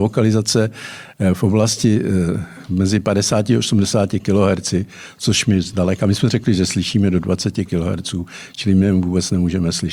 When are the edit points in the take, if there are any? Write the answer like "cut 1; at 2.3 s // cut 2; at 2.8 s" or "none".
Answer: none